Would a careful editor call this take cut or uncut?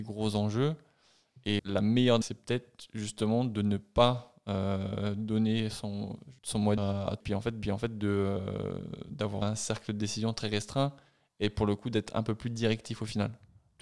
cut